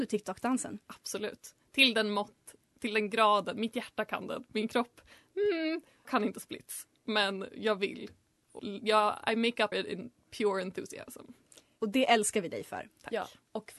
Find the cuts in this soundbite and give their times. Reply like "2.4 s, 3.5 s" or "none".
6.0 s, 8.6 s, 9.7 s